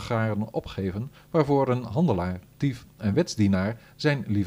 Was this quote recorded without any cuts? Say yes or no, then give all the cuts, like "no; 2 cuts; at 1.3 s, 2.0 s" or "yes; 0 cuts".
yes; 0 cuts